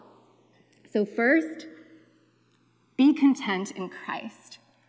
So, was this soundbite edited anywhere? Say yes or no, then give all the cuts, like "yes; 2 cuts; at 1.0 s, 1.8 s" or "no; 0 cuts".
no; 0 cuts